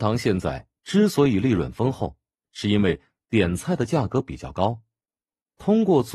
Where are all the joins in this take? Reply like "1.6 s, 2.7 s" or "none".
none